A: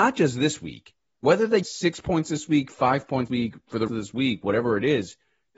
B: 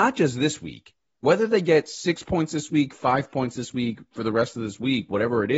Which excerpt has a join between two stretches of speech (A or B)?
A